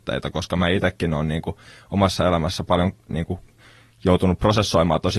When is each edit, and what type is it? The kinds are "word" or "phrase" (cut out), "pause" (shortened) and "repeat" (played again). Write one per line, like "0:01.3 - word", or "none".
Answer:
none